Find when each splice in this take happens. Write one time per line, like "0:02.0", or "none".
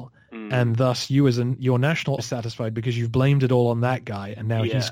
0:02.2